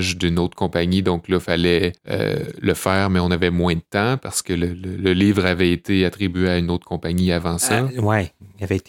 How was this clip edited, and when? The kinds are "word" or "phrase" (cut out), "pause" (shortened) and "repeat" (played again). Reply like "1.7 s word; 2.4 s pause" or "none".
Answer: 2.0 s pause